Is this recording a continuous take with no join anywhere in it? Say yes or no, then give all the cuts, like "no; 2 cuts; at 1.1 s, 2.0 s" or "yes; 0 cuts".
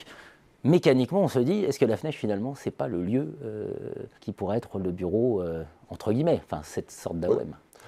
no; 1 cut; at 4.1 s